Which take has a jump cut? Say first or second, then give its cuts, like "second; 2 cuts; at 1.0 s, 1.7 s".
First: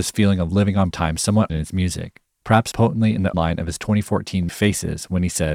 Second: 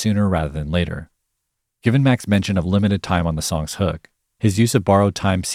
first; 5 cuts; at 0.9 s, 1.5 s, 2.7 s, 3.3 s, 4.5 s